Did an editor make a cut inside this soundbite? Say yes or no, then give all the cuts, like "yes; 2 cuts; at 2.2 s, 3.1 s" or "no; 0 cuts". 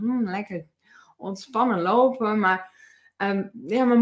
no; 0 cuts